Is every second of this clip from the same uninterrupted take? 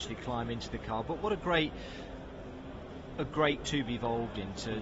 no; 1 cut; at 3.6 s

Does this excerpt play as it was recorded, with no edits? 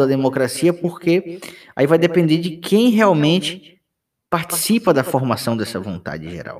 yes; 0 cuts

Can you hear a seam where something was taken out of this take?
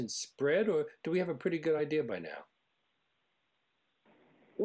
no; 0 cuts

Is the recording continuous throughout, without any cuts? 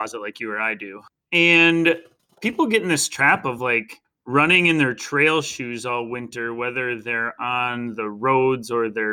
yes; 0 cuts

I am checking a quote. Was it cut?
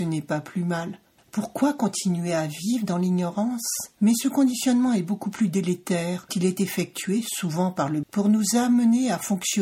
yes; 3 cuts; at 3.9 s, 6.3 s, 8.0 s

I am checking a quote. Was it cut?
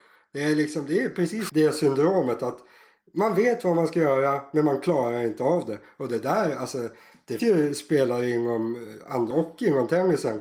yes; 3 cuts; at 1.5 s, 7.4 s, 9.3 s

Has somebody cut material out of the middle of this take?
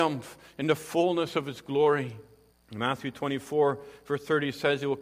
yes; 1 cut; at 2.5 s

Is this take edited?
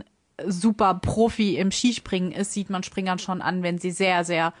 no; 0 cuts

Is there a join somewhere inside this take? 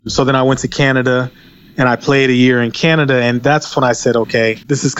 no; 0 cuts

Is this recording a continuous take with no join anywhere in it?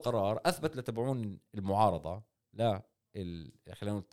yes; 0 cuts

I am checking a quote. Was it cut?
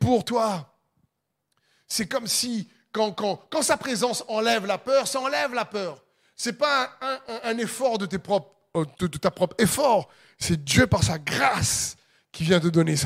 no; 0 cuts

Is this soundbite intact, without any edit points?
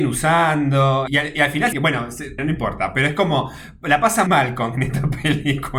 no; 4 cuts; at 1.1 s, 1.7 s, 2.4 s, 4.3 s

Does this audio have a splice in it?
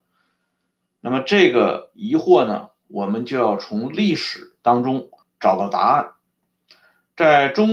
yes; 2 cuts; at 4.6 s, 5.2 s

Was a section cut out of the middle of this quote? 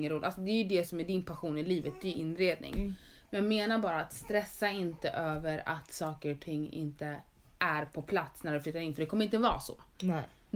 no; 0 cuts

